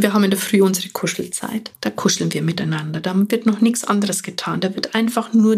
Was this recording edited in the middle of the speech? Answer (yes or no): yes